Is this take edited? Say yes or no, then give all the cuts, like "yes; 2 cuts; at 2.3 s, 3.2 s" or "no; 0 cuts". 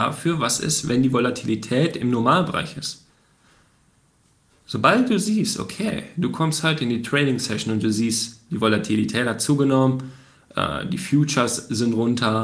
no; 0 cuts